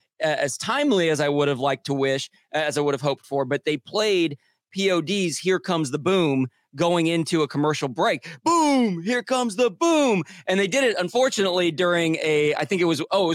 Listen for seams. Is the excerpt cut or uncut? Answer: uncut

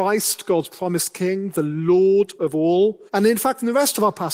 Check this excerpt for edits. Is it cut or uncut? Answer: cut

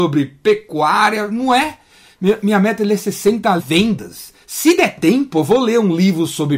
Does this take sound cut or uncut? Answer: cut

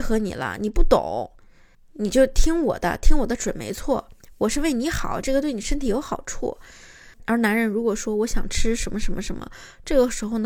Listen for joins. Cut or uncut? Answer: uncut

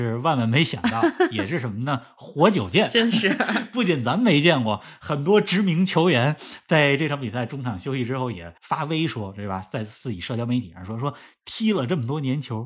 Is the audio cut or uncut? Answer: cut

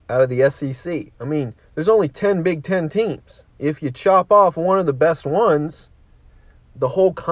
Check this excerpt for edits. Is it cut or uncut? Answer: cut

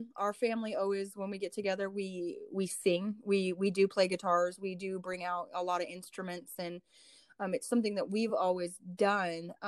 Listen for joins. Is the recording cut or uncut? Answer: uncut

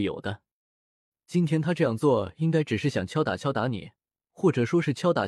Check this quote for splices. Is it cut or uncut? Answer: cut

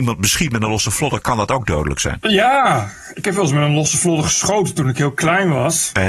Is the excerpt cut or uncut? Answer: uncut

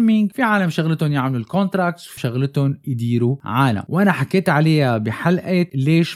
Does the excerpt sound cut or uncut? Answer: cut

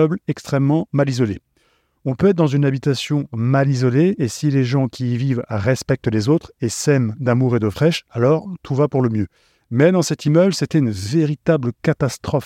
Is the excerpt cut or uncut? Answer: uncut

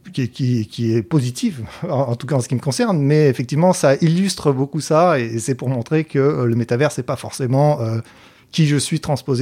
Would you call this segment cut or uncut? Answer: uncut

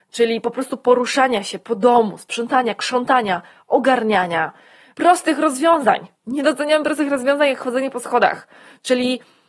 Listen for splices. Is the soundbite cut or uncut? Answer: cut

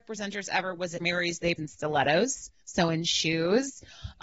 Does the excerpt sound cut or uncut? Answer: cut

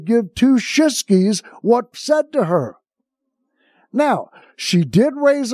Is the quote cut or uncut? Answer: cut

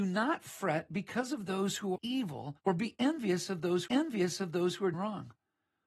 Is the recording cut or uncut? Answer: cut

